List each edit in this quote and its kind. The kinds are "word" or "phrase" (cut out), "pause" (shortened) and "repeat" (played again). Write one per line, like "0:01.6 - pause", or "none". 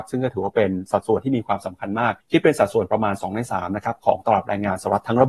0:02.2 - pause